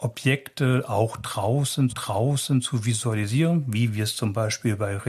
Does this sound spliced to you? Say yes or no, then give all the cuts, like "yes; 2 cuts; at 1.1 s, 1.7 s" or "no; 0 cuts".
yes; 1 cut; at 1.9 s